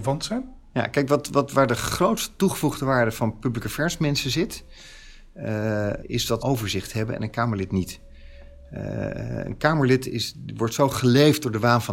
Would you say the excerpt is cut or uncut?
cut